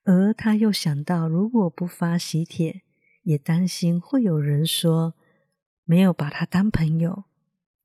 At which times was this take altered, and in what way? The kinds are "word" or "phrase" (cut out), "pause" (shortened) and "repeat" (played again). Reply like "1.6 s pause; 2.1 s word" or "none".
none